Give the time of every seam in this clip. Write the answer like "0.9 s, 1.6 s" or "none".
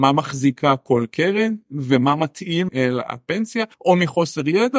2.7 s, 3.7 s